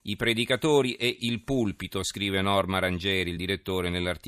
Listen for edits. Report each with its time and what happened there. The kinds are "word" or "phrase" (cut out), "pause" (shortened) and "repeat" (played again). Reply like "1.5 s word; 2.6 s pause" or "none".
none